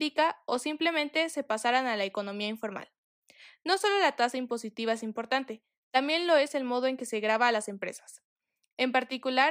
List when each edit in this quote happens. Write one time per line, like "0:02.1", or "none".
none